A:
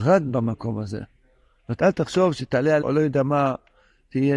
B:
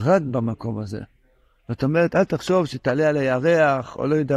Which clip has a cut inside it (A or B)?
A